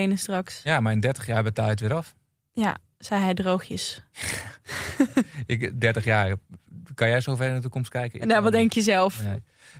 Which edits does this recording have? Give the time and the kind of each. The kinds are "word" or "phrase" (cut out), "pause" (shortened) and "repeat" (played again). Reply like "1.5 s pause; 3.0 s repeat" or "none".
none